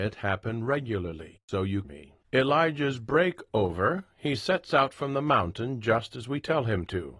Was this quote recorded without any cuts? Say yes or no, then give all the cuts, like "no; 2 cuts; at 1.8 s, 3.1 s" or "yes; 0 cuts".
no; 2 cuts; at 1.8 s, 2.2 s